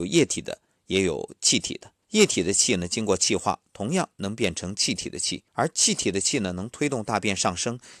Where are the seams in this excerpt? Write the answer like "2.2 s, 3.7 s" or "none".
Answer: 2.0 s, 5.5 s